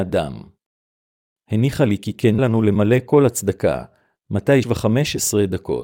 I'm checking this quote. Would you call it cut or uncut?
cut